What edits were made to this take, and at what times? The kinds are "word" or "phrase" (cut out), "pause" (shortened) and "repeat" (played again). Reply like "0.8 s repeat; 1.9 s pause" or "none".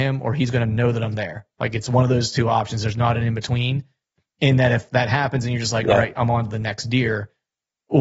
none